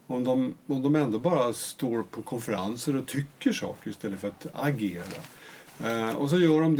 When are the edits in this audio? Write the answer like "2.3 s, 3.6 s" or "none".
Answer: none